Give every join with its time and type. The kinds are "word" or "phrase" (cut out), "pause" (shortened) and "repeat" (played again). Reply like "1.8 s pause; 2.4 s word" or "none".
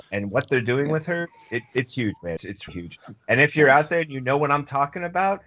2.4 s word; 2.7 s word